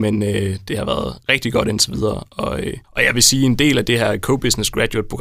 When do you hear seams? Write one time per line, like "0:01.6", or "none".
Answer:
0:02.8